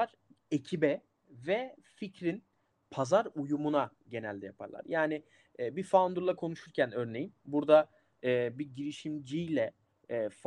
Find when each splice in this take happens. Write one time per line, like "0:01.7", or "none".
none